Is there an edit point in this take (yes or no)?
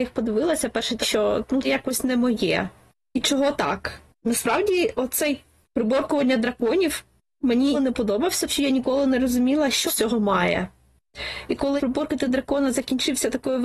yes